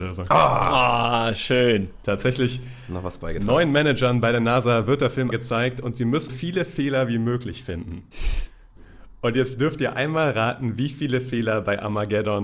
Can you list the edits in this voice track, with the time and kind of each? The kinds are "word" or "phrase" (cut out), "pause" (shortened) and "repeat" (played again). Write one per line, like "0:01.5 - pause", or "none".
0:05.3 - word
0:06.3 - word